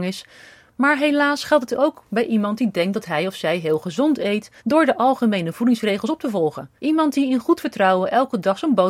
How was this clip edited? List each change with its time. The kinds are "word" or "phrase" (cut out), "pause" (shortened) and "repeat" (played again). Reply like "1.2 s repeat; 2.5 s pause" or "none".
4.6 s pause; 6.8 s pause